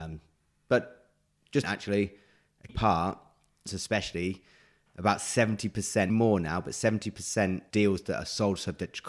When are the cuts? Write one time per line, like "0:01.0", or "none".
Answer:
0:01.6
0:02.7
0:03.7
0:06.1
0:07.7